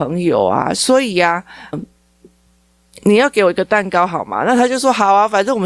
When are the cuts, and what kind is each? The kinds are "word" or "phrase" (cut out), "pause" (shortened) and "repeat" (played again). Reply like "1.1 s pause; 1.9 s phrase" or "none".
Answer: 1.7 s word